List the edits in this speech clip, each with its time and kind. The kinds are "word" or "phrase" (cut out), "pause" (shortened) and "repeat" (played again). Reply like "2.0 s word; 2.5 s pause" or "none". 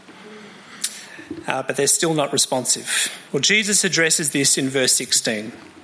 3.3 s pause